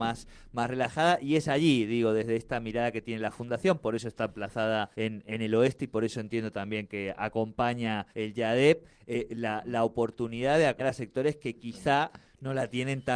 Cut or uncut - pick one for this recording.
cut